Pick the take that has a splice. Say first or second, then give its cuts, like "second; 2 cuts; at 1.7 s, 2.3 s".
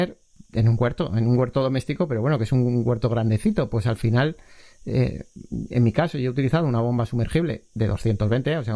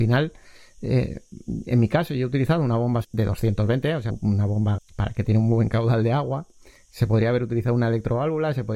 second; 3 cuts; at 3.0 s, 4.1 s, 4.8 s